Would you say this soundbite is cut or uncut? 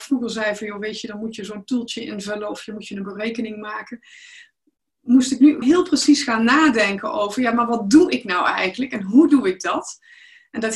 cut